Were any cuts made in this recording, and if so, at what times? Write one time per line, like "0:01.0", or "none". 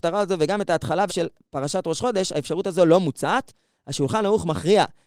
0:01.1